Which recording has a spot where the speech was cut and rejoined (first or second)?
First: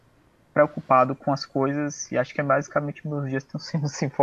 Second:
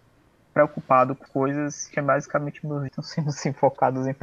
second